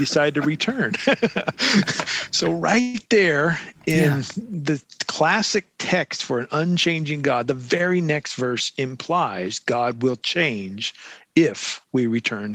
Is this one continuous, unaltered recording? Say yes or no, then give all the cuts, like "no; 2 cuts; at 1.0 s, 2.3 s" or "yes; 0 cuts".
yes; 0 cuts